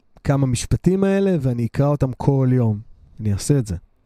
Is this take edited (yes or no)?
no